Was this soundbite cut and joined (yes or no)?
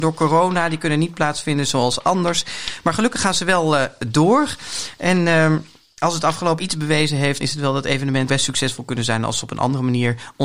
yes